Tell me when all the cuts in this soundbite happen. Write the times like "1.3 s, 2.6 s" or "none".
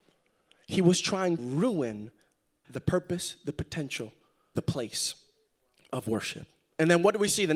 1.4 s, 2.6 s, 4.6 s